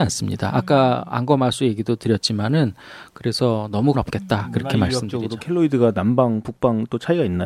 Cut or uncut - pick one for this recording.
cut